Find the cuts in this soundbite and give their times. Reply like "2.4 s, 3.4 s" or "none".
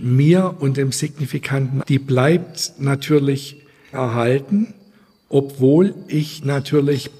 1.8 s, 3.9 s